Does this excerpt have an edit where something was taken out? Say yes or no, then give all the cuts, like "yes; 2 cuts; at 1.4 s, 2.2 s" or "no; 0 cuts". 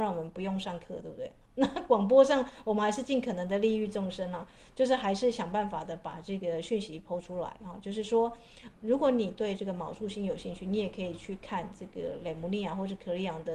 yes; 2 cuts; at 1.5 s, 8.7 s